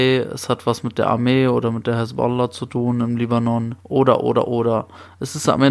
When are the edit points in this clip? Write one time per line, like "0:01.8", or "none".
0:03.8